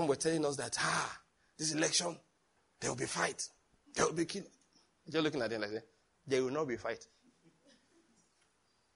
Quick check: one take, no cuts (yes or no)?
yes